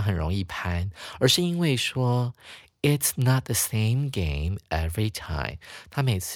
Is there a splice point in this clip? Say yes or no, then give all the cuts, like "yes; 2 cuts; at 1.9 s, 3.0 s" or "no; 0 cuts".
no; 0 cuts